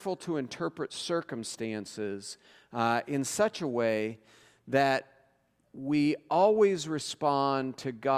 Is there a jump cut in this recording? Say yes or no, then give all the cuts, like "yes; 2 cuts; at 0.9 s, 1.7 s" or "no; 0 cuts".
no; 0 cuts